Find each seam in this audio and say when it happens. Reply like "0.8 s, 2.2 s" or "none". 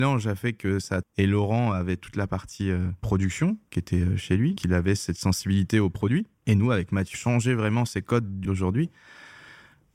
1.0 s, 3.7 s, 4.6 s, 6.4 s, 7.1 s, 8.4 s